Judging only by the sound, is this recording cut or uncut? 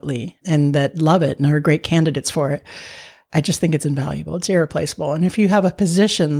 uncut